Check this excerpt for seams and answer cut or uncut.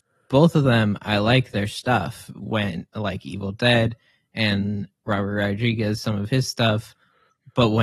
uncut